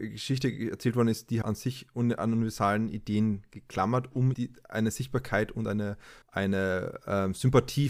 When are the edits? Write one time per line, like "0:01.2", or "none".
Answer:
0:01.4
0:04.3
0:06.2